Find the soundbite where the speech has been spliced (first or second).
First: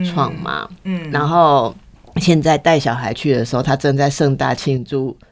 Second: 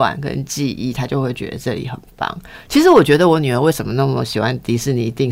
first